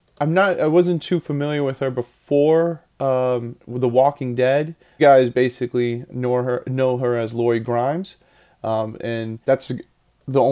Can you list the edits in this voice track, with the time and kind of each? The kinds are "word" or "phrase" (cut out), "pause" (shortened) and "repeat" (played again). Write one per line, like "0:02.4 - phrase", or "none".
0:02.9 - pause
0:05.0 - phrase
0:06.1 - word
0:09.4 - pause